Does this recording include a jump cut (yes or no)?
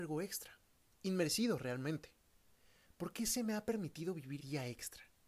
yes